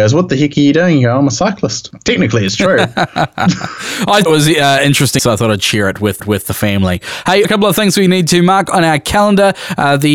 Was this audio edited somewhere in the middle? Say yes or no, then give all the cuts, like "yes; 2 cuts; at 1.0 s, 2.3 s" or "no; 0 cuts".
yes; 4 cuts; at 4.3 s, 5.2 s, 6.2 s, 7.4 s